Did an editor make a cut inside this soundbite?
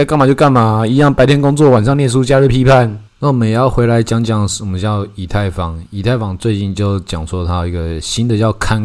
yes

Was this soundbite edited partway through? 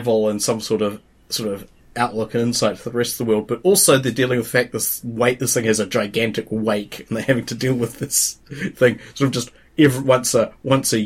no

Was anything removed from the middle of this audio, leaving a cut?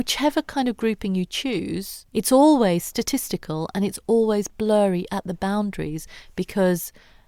yes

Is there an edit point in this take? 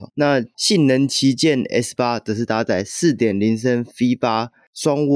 no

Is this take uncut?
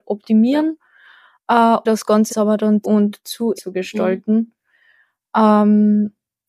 no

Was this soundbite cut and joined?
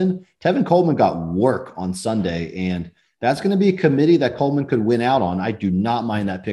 no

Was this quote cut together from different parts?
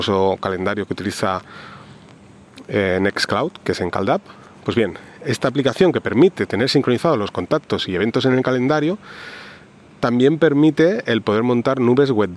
no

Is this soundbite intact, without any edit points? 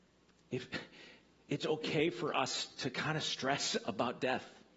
yes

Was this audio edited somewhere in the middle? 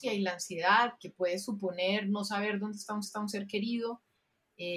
yes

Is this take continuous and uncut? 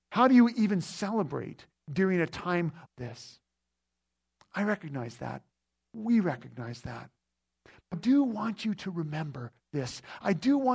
no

